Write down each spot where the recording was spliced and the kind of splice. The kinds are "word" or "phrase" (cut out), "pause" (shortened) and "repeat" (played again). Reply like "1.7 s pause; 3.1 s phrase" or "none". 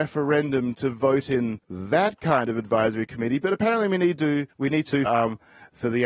1.6 s pause; 4.5 s pause; 5.1 s word